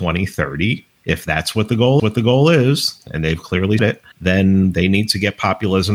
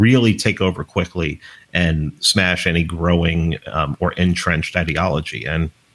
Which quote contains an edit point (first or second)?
first